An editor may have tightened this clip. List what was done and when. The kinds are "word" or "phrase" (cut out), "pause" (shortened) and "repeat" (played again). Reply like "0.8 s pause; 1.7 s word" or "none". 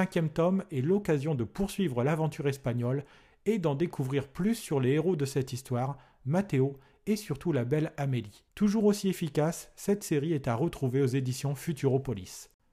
8.5 s pause